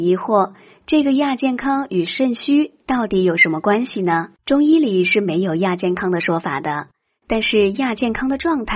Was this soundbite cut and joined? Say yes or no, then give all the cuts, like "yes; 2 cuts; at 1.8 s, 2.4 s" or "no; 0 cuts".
yes; 1 cut; at 4.4 s